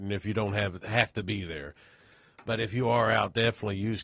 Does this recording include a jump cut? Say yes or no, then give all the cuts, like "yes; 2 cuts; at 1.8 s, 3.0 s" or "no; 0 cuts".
no; 0 cuts